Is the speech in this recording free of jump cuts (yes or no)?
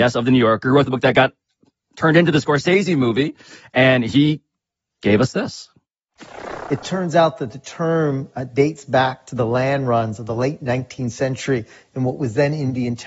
yes